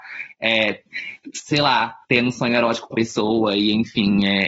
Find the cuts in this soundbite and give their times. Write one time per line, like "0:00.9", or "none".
0:02.0
0:02.9